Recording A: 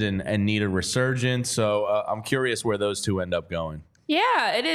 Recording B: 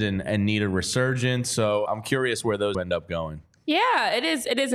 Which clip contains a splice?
B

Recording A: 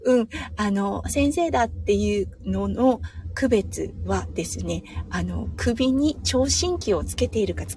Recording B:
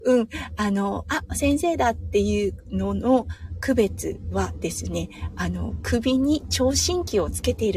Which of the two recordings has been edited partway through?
A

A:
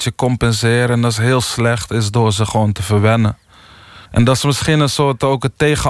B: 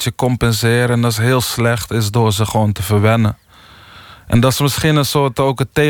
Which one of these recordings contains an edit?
A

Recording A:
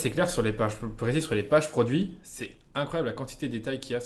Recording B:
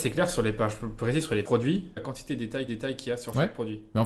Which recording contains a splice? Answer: B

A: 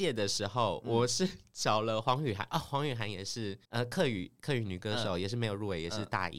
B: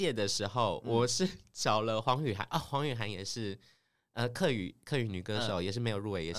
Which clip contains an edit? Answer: A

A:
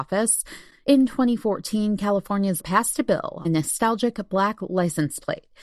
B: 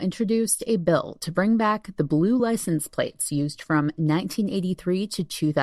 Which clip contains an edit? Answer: A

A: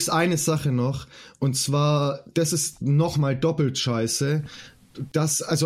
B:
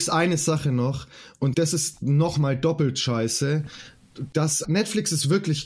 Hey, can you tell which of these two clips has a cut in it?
B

